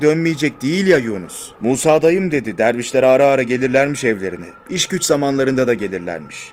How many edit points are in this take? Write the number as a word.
two